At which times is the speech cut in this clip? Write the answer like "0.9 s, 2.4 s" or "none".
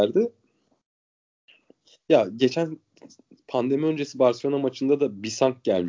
none

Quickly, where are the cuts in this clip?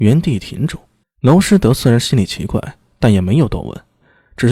1.0 s

